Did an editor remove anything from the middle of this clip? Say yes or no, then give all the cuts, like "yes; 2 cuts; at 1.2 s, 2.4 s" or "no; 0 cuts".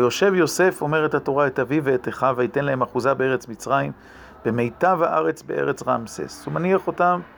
no; 0 cuts